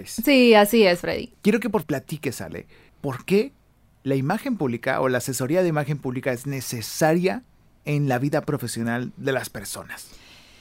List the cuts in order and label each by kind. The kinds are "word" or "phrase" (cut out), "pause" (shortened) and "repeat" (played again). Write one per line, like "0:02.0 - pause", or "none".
0:01.8 - phrase